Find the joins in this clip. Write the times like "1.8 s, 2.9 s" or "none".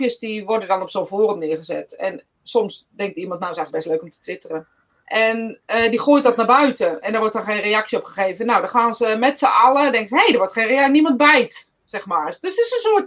4.9 s